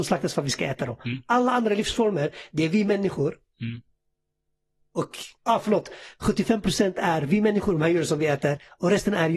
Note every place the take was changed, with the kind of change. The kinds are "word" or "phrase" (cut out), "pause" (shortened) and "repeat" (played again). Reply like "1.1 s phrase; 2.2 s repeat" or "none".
5.4 s pause